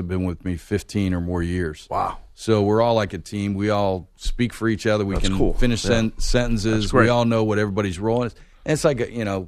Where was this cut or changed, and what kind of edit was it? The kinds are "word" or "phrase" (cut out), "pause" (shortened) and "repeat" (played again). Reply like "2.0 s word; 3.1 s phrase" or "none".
none